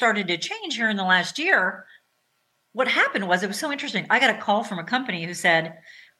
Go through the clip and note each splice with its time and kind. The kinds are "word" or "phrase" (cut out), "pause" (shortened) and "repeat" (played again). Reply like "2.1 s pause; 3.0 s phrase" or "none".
none